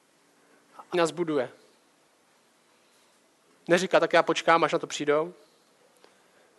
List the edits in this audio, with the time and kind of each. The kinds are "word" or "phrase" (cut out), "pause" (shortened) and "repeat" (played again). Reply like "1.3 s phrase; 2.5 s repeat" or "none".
0.9 s word